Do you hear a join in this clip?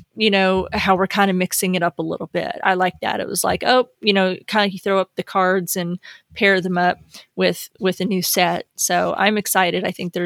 no; 0 cuts

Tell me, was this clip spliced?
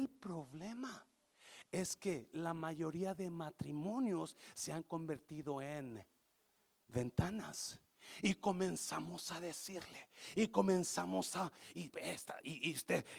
no; 0 cuts

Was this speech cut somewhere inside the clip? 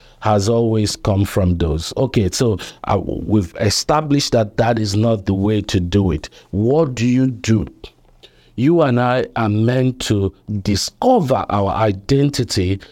no; 0 cuts

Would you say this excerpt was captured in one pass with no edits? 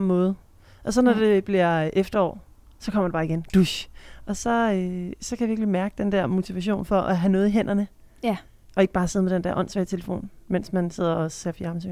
yes; 0 cuts

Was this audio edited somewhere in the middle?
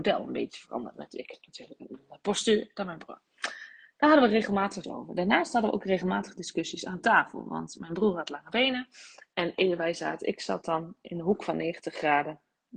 yes; 1 cut; at 4.8 s

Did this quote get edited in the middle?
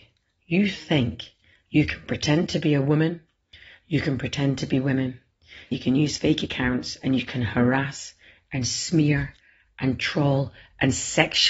yes; 1 cut; at 5.7 s

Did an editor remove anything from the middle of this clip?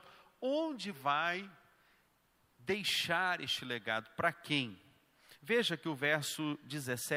yes; 1 cut; at 0.9 s

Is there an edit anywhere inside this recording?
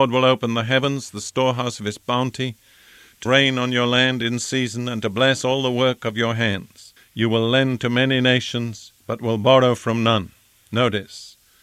yes; 3 cuts; at 3.3 s, 7.0 s, 9.0 s

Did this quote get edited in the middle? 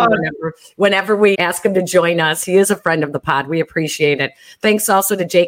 yes; 1 cut; at 1.3 s

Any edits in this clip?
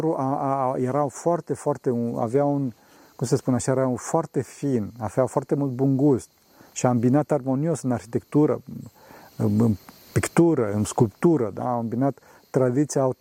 no; 0 cuts

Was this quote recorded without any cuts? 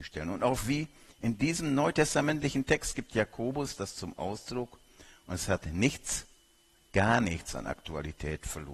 yes; 0 cuts

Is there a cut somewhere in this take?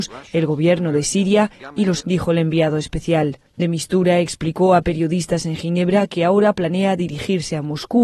yes; 2 cuts; at 2.0 s, 3.5 s

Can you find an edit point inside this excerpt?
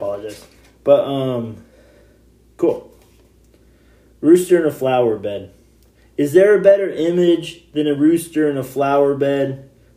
no; 0 cuts

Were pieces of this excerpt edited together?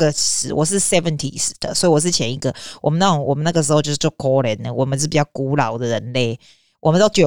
no; 0 cuts

